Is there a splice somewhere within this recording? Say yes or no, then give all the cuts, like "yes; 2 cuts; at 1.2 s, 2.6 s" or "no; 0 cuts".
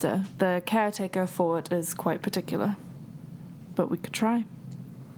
no; 0 cuts